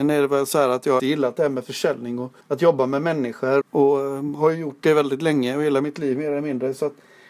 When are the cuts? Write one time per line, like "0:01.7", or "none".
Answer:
0:01.0
0:02.4
0:03.6